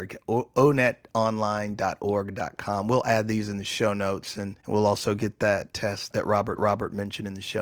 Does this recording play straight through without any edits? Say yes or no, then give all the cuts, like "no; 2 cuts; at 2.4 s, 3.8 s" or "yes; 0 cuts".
no; 3 cuts; at 4.6 s, 5.7 s, 6.6 s